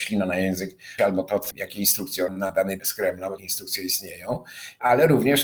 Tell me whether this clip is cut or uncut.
cut